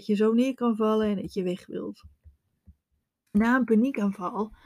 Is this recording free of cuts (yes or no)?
yes